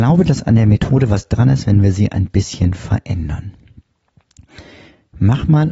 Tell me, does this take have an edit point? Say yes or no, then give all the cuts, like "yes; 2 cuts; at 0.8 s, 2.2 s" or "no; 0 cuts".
no; 0 cuts